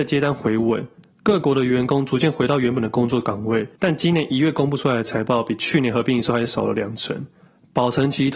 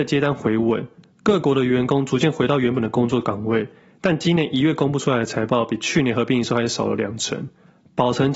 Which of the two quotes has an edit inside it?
first; 1 cut; at 3.8 s

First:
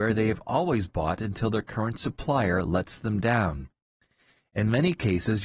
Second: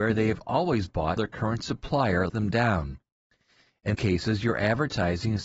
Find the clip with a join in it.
second; 3 cuts; at 1.2 s, 2.3 s, 3.9 s

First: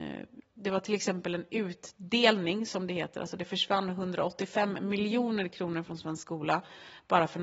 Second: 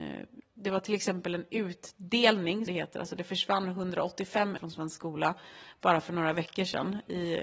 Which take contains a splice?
second; 2 cuts; at 2.7 s, 4.6 s

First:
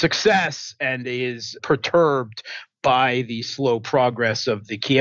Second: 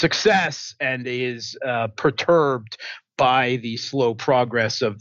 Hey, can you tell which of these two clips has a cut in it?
first; 1 cut; at 1.6 s

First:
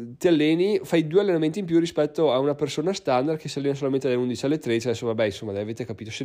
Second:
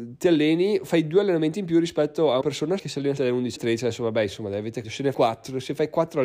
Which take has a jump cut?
second; 6 cuts; at 2.4 s, 2.8 s, 3.2 s, 3.6 s, 4.8 s, 5.1 s

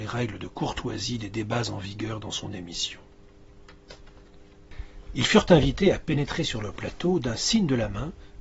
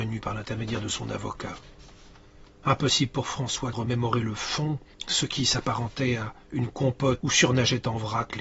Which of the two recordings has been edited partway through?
second; 3 cuts; at 3.7 s, 4.9 s, 7.2 s

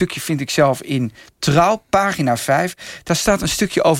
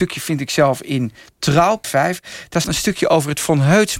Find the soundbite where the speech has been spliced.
second; 2 cuts; at 1.8 s, 2.6 s

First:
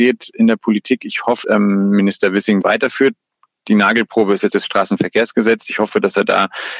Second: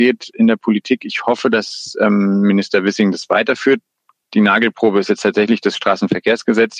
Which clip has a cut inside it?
first; 3 cuts; at 1.4 s, 2.6 s, 4.5 s

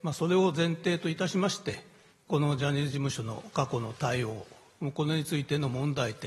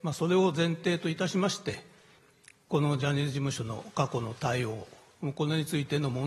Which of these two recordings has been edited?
first; 1 cut; at 2.1 s

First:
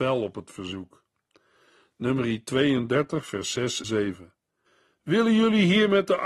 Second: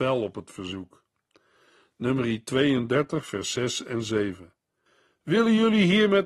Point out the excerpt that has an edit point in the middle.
first; 1 cut; at 3.8 s

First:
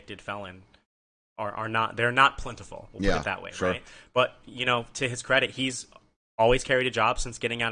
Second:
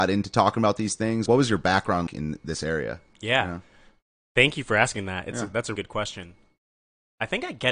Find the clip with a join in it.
second; 3 cuts; at 1.3 s, 2.1 s, 5.8 s

